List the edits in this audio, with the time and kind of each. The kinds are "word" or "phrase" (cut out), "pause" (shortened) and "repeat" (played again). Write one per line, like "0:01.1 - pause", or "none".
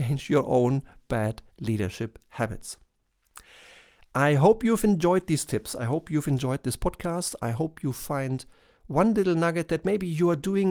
0:01.5 - pause